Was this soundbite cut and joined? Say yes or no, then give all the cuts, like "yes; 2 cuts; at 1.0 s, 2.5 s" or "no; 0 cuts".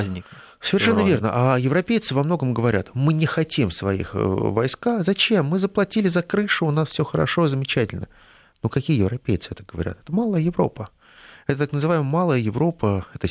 no; 0 cuts